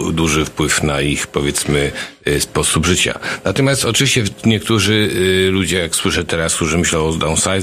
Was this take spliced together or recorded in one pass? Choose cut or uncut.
uncut